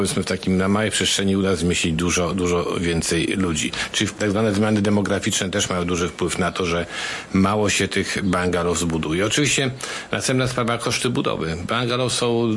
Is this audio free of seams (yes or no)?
yes